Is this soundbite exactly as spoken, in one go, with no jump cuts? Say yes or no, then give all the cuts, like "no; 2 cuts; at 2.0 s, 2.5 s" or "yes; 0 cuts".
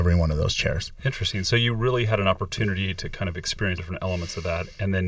no; 1 cut; at 3.8 s